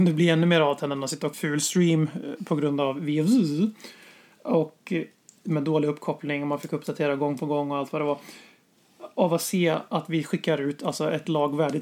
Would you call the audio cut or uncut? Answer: cut